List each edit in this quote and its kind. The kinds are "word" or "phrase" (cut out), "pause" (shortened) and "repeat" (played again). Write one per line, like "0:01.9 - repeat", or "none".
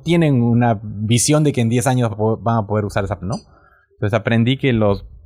0:02.1 - word
0:03.2 - word